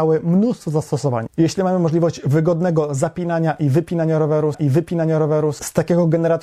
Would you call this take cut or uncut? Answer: cut